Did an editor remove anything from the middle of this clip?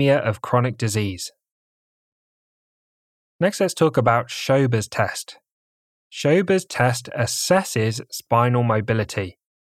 no; 0 cuts

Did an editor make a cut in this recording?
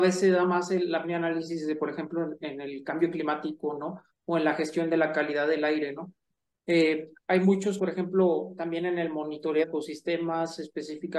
yes; 3 cuts; at 1.0 s, 7.8 s, 9.6 s

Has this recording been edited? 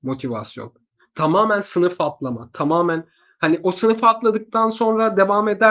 no; 0 cuts

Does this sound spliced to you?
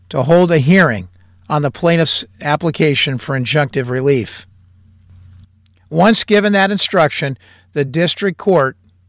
no; 0 cuts

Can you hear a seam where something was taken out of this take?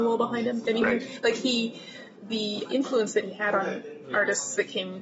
yes; 1 cut; at 2.7 s

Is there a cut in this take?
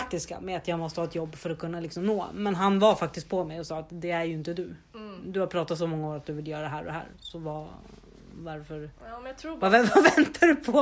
yes; 1 cut; at 9.0 s

